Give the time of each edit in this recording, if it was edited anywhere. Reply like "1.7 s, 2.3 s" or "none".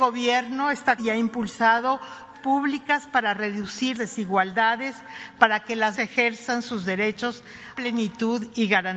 1.0 s, 2.3 s, 3.9 s, 5.9 s, 7.7 s